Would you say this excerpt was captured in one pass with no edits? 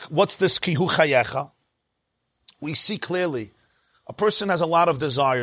yes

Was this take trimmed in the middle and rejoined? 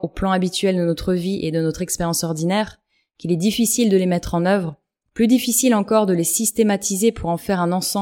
no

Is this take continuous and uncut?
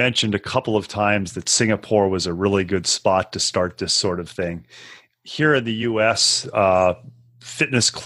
yes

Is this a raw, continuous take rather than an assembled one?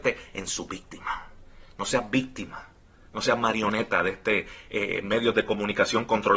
yes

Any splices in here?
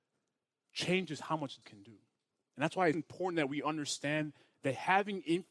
yes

